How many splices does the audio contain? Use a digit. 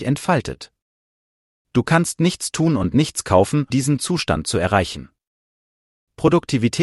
1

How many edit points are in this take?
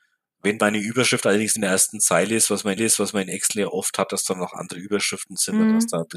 2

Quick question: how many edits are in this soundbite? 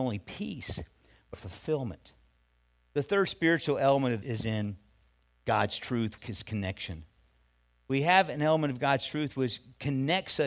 3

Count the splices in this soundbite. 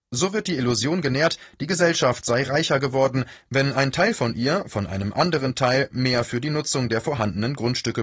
0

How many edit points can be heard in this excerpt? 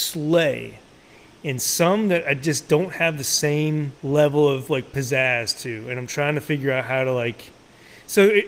1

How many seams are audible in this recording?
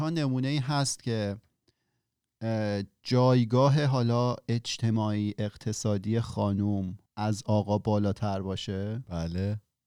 1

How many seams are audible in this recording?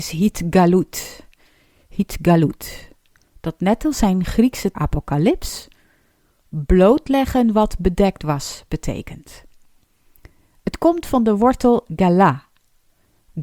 1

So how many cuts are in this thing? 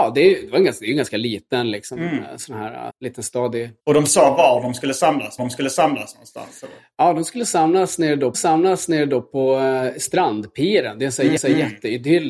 5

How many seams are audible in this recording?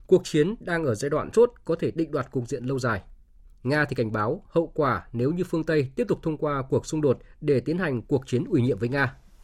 1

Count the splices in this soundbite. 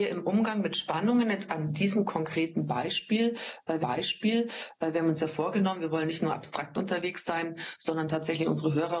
1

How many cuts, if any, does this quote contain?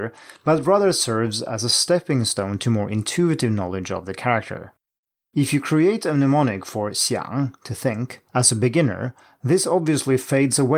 0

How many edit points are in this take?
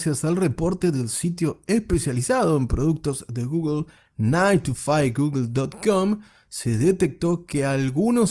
0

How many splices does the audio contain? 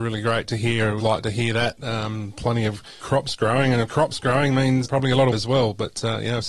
5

